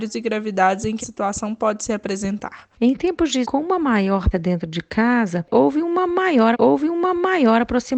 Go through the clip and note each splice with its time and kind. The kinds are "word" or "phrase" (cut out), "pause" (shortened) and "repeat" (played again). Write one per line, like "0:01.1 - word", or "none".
0:01.0 - word
0:02.7 - pause
0:03.4 - phrase
0:04.3 - word
0:06.5 - repeat